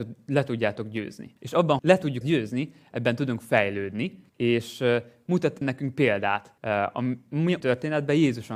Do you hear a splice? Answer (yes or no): yes